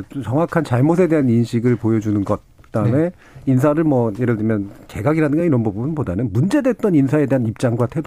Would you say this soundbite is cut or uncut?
uncut